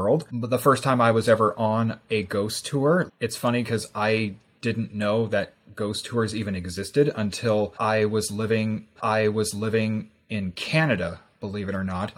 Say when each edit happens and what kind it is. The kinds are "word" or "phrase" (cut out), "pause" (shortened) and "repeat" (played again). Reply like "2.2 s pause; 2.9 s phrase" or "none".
3.1 s word; 9.0 s repeat

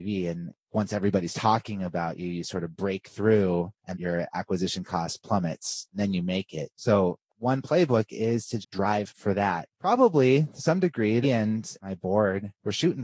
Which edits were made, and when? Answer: 3.9 s word; 8.6 s word; 11.2 s phrase

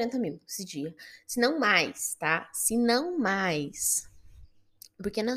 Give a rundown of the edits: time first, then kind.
none

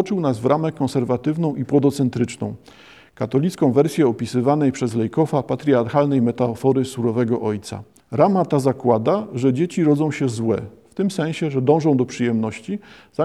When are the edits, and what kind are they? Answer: 8.0 s pause

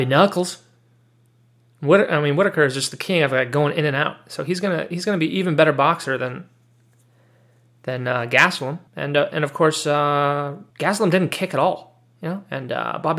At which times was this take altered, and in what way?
8.9 s pause; 10.7 s pause

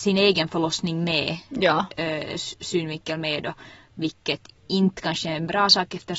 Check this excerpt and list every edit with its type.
none

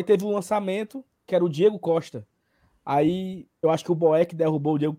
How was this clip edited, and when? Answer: 1.3 s word; 3.6 s word

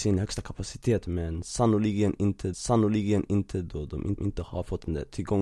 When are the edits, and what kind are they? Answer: 2.5 s repeat; 4.2 s repeat

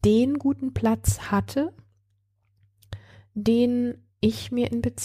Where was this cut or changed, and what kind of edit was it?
4.1 s pause

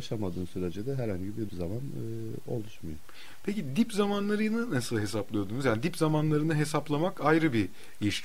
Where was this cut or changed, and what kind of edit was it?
1.5 s phrase

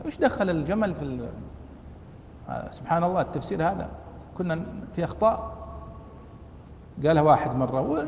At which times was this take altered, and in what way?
none

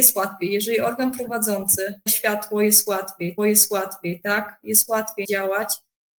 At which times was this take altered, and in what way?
2.1 s phrase; 3.4 s repeat; 5.2 s word

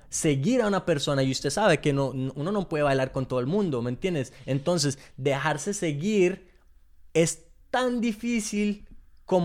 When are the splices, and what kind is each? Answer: none

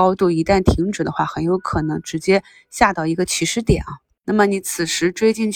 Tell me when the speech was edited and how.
none

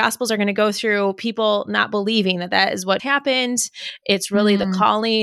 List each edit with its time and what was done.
3.0 s word

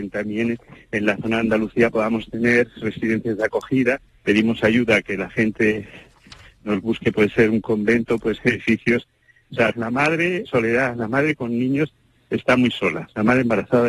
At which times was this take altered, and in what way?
4.1 s pause; 8.4 s word; 9.7 s word; 10.5 s word

